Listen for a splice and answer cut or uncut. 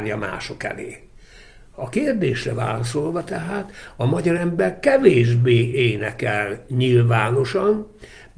uncut